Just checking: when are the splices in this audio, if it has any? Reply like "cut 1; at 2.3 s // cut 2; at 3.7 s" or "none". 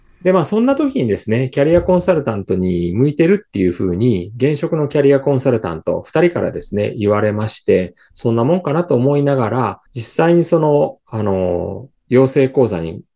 cut 1; at 9.9 s // cut 2; at 11.0 s

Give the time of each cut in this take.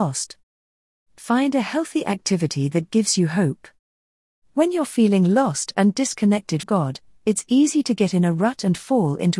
cut 1; at 6.6 s

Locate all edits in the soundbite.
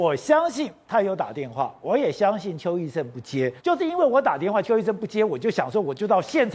cut 1; at 3.6 s

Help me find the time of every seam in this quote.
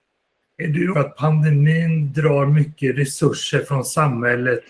cut 1; at 0.9 s

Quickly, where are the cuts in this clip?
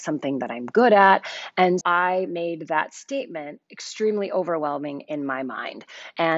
cut 1; at 1.8 s // cut 2; at 3.6 s

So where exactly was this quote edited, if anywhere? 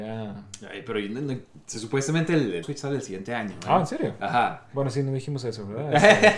cut 1; at 2.6 s

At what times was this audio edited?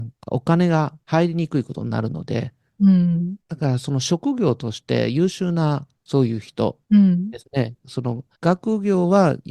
cut 1; at 1.0 s // cut 2; at 3.4 s // cut 3; at 5.9 s // cut 4; at 6.8 s // cut 5; at 8.3 s

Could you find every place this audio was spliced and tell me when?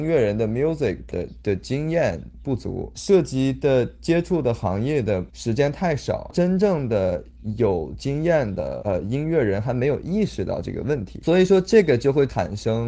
cut 1; at 1.1 s

